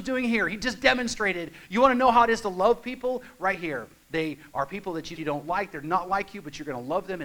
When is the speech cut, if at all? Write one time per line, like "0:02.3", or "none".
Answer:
0:04.0
0:05.2